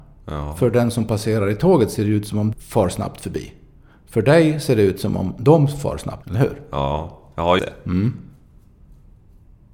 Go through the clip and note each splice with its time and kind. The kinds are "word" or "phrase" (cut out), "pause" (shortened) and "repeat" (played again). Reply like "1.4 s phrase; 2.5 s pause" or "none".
2.5 s word; 6.2 s word; 7.6 s word